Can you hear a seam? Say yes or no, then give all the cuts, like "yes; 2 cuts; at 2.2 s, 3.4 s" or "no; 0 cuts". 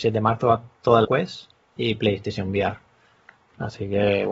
yes; 1 cut; at 1.0 s